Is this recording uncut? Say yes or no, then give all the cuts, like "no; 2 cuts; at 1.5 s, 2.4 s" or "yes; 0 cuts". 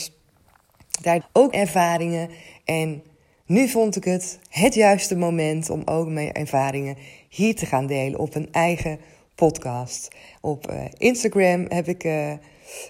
no; 2 cuts; at 1.2 s, 1.5 s